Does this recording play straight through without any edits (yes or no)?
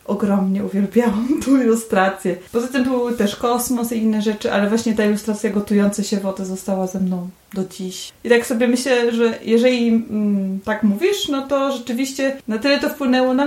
yes